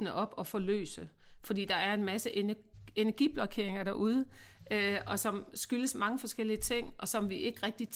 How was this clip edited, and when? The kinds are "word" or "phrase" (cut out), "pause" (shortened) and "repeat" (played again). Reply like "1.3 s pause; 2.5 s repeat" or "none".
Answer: none

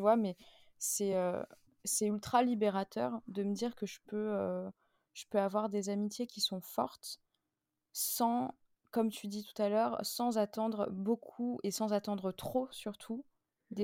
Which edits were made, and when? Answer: none

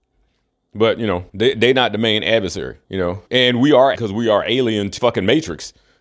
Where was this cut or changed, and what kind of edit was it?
1.3 s pause; 2.8 s pause; 3.3 s pause; 3.9 s word; 5.0 s word

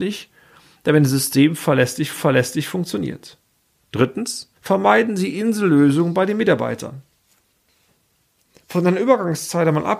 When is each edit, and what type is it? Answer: 2.1 s repeat; 4.6 s pause

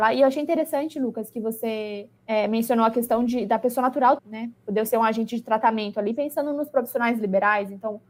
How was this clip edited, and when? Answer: 2.2 s pause; 4.2 s word

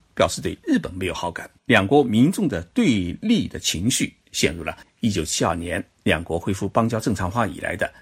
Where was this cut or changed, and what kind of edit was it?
1.6 s pause; 4.8 s pause; 5.9 s pause

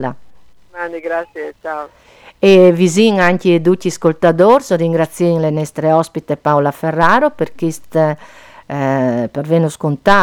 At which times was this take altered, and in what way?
none

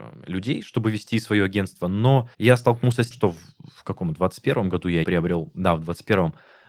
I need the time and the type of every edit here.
2.3 s pause; 3.1 s word; 5.0 s word

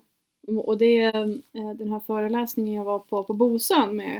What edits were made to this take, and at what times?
1.5 s pause

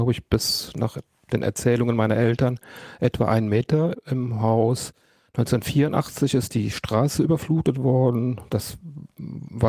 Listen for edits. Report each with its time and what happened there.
none

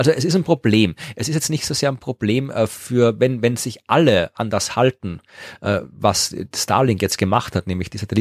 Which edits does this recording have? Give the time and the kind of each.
none

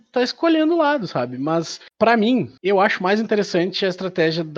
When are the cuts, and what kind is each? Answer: 1.9 s pause; 2.6 s pause

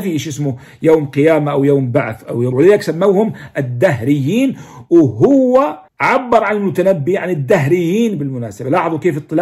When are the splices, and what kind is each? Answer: 2.5 s word; 5.9 s pause

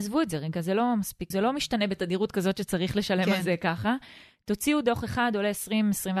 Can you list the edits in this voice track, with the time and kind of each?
1.3 s word

